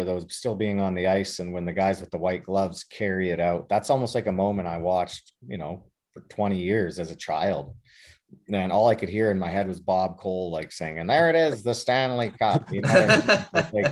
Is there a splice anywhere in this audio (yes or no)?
no